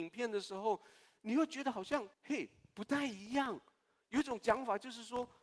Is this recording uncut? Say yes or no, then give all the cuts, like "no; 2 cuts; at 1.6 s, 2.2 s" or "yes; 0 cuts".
no; 1 cut; at 2.1 s